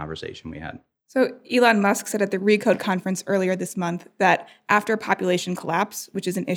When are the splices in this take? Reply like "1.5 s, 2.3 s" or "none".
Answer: none